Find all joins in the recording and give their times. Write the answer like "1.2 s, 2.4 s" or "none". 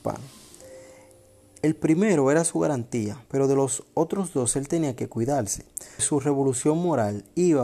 3.3 s, 6.0 s

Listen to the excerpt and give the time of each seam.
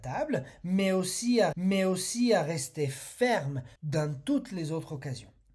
1.5 s, 3.8 s

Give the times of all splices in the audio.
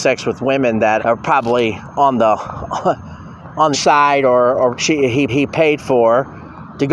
1.0 s, 3.7 s, 4.7 s, 5.3 s

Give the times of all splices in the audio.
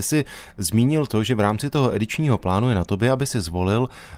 none

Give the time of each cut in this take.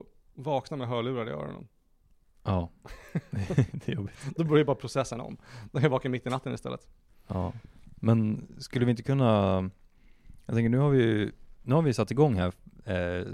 none

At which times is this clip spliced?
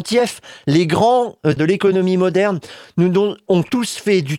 1.6 s

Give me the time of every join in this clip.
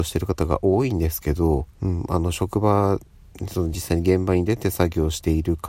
1.7 s

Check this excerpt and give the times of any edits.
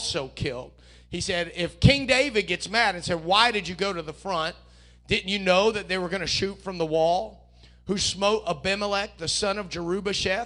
none

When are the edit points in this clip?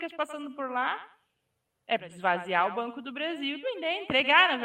2.0 s, 3.6 s

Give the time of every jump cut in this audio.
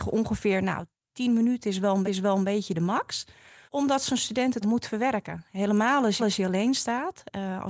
2.0 s, 3.7 s, 4.6 s, 6.2 s

